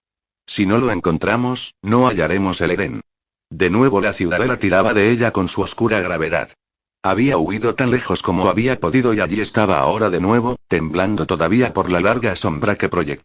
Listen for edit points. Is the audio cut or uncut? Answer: uncut